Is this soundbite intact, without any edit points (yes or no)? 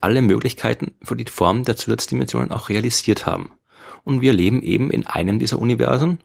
yes